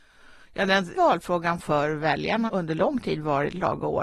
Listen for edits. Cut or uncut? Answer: cut